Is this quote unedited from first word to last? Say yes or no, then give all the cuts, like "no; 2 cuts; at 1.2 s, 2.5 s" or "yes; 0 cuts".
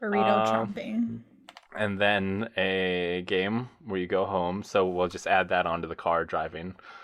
no; 1 cut; at 1.7 s